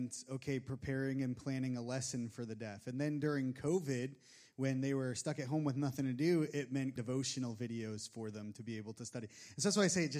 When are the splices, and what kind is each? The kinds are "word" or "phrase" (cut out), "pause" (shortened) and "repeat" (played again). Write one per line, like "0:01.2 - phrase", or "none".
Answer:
0:07.0 - word